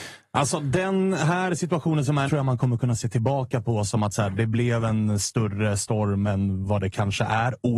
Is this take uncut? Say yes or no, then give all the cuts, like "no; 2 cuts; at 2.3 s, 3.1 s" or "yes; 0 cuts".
no; 1 cut; at 2.3 s